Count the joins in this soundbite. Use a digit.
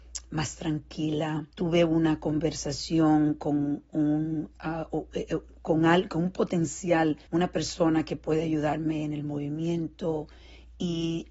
2